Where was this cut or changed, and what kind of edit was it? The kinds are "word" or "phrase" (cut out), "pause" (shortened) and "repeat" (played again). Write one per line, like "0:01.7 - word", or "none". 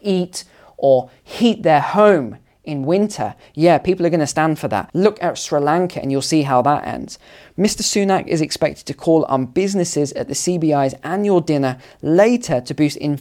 none